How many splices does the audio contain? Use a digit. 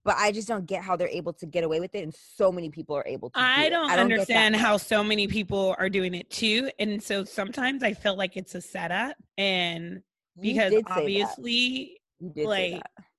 2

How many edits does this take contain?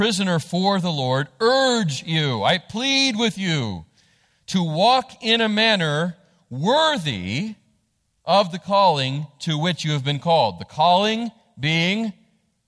0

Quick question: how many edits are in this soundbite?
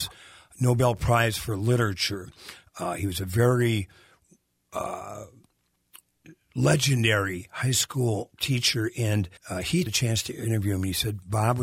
3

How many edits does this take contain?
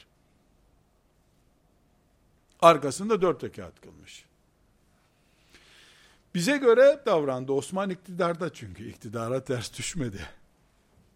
1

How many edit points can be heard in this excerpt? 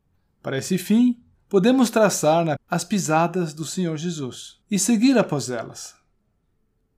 3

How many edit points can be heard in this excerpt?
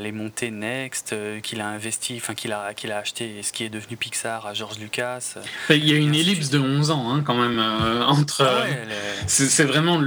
0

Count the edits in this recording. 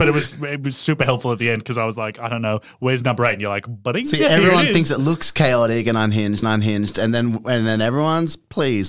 1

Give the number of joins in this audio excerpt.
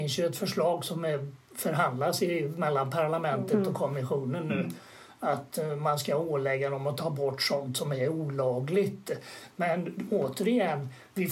0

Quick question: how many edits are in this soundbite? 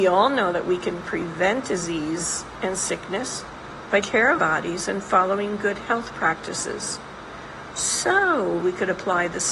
3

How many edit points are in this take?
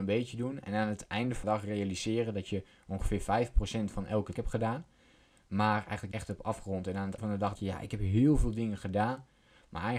5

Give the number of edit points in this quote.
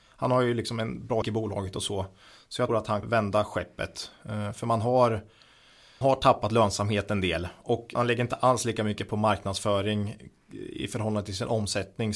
5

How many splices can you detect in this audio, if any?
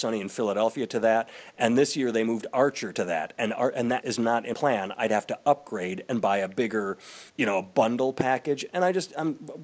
3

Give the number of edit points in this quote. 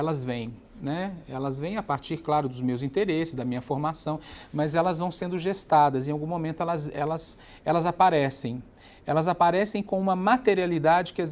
0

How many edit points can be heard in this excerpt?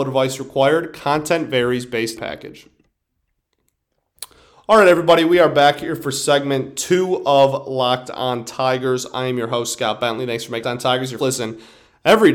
3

